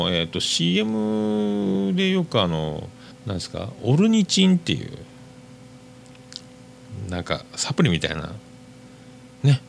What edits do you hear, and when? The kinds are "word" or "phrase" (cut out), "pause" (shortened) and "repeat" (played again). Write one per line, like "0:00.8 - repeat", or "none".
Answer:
0:03.1 - pause